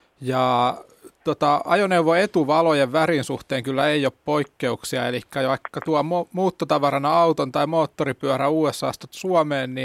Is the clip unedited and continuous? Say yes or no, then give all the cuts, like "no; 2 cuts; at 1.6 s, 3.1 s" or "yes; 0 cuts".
yes; 0 cuts